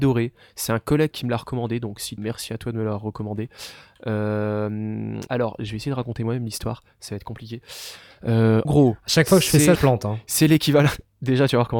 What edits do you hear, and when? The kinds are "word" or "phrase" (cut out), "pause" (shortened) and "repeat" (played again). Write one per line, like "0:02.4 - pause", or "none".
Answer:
0:01.1 - phrase
0:02.2 - phrase
0:05.3 - word
0:08.7 - word
0:09.8 - phrase